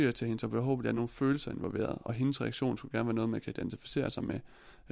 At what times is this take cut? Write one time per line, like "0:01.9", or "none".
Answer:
none